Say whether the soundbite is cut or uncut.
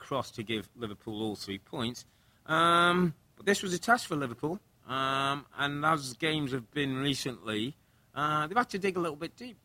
uncut